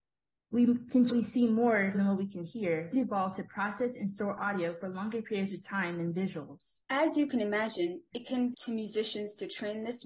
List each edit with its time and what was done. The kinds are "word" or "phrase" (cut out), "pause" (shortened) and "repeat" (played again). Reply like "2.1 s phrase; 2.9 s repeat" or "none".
1.1 s phrase; 1.9 s word; 2.9 s phrase; 6.8 s pause; 8.5 s word